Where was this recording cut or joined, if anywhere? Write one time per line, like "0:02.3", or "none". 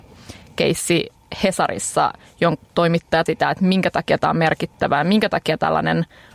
0:02.6
0:03.3

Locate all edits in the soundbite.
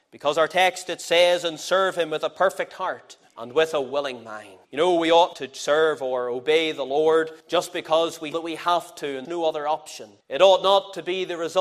0:03.3
0:04.6
0:05.3
0:07.4
0:08.3
0:09.2
0:10.2

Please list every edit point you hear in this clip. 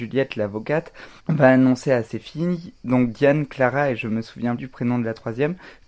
0:01.2
0:04.6

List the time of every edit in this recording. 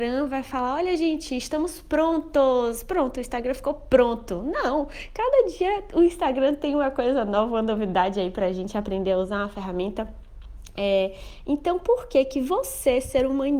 none

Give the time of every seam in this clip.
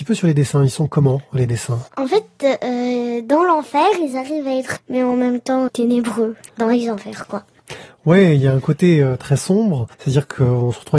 0:01.9
0:04.8
0:05.7
0:09.2
0:09.9

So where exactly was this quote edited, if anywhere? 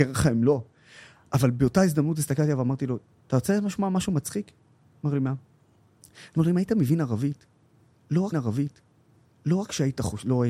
0:03.1
0:08.3

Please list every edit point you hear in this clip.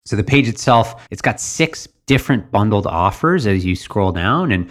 0:01.1

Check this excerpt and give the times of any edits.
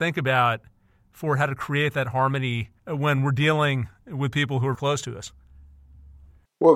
0:02.8
0:04.7

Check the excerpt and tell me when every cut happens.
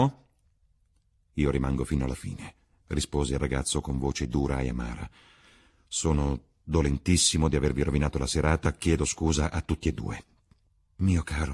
none

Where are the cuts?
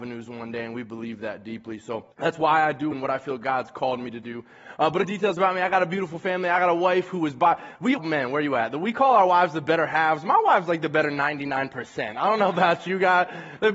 0:02.1
0:02.9
0:05.0
0:08.0

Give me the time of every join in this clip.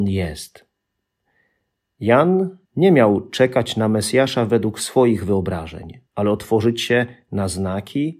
0:02.6
0:06.1

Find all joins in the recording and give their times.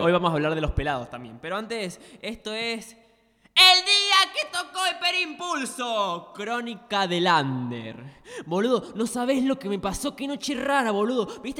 none

